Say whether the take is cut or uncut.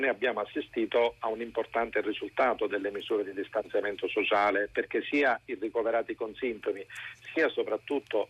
uncut